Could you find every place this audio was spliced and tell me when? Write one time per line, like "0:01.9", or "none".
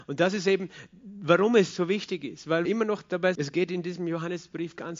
0:02.7
0:03.4